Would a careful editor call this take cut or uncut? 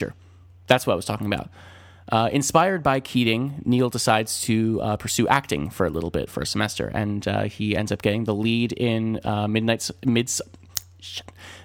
uncut